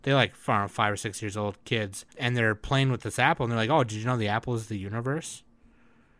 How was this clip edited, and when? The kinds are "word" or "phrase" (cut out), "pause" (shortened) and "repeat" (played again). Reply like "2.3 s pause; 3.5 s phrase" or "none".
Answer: 2.1 s pause